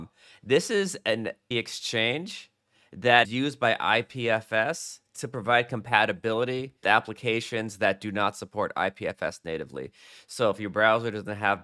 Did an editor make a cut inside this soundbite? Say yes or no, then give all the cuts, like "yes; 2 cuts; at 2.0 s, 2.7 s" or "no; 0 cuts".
yes; 3 cuts; at 1.5 s, 3.2 s, 6.8 s